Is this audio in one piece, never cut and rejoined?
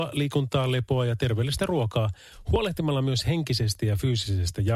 yes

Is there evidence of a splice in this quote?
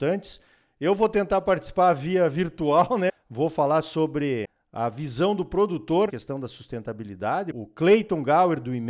yes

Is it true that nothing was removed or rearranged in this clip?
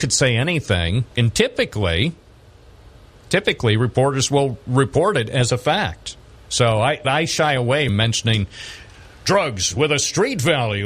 no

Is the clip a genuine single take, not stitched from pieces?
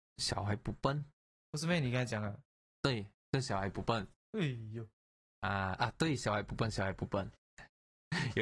yes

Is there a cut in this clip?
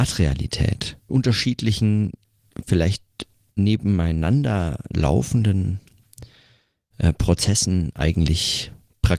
yes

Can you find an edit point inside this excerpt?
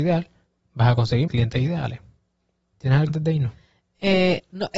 yes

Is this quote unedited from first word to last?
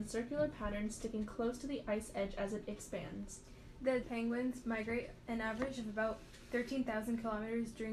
no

